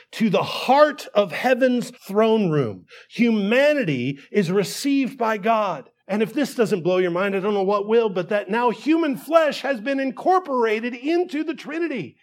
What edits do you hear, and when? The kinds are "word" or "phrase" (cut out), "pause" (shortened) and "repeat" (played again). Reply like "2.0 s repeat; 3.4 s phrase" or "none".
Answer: 1.9 s pause; 6.0 s pause

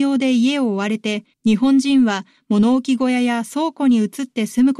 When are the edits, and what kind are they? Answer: 1.3 s pause

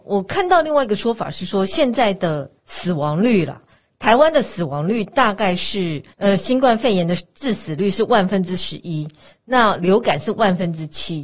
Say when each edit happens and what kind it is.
2.6 s pause; 6.1 s pause

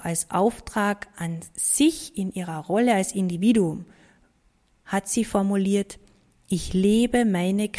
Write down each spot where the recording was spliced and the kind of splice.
none

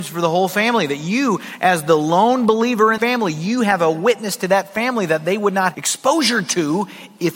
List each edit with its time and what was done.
3.0 s word; 5.7 s word

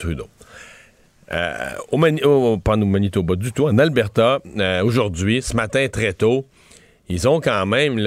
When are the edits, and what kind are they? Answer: none

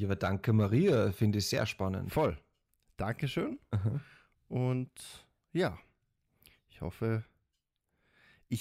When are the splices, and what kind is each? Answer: none

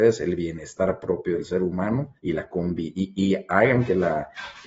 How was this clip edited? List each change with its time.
2.2 s pause

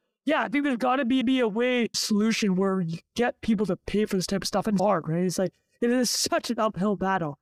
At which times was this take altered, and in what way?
1.2 s repeat; 1.9 s phrase; 4.8 s word

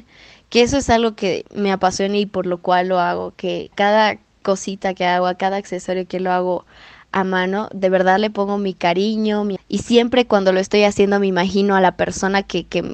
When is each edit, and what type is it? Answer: 3.7 s word; 9.6 s word

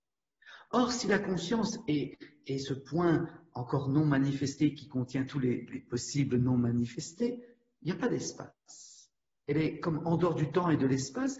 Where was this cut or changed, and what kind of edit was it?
none

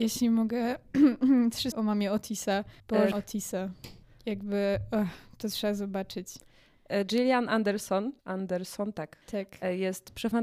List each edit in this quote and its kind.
1.7 s word; 2.8 s pause; 3.1 s phrase; 4.0 s pause; 8.2 s pause; 9.2 s pause

